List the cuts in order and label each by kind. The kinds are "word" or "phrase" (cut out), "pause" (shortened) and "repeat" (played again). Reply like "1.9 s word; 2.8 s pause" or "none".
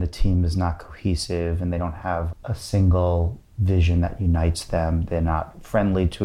2.3 s word